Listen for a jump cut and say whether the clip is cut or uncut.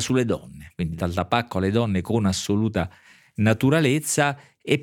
uncut